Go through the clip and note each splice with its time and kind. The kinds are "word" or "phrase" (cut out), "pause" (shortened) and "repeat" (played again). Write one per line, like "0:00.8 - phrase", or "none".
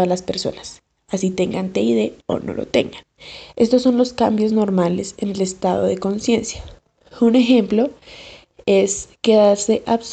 none